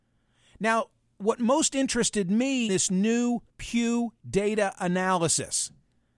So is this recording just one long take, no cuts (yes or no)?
no